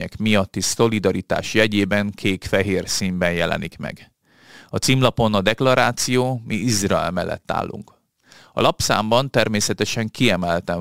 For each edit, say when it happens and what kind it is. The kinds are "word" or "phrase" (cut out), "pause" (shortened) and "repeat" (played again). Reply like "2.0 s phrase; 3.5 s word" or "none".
none